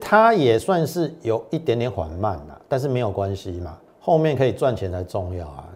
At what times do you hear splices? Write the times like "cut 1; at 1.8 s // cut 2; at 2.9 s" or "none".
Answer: cut 1; at 3.9 s